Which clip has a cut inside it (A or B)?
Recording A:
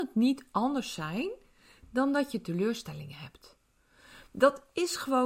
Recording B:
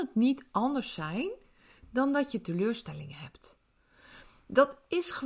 A